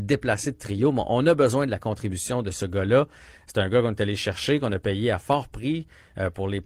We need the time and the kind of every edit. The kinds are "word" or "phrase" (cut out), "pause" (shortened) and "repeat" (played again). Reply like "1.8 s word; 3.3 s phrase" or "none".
none